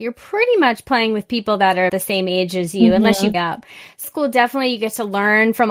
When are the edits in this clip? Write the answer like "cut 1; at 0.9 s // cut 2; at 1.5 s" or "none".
cut 1; at 1.9 s // cut 2; at 3.3 s // cut 3; at 4.0 s